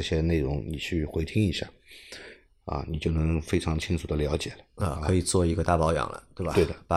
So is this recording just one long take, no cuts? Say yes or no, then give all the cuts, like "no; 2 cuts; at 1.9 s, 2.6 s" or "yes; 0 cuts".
yes; 0 cuts